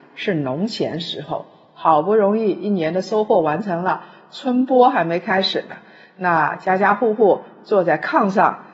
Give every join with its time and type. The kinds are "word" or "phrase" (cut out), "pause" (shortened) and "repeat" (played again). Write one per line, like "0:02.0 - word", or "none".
none